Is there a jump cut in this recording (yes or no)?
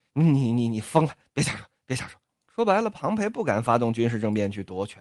yes